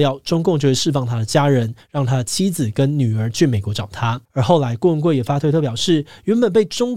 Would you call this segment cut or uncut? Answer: cut